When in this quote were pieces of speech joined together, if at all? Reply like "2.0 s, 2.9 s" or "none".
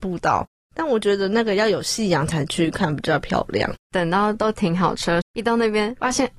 3.8 s, 5.2 s